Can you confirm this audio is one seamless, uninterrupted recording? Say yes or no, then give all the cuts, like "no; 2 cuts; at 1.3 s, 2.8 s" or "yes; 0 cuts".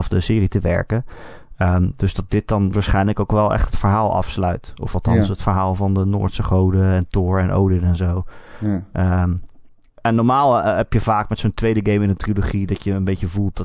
yes; 0 cuts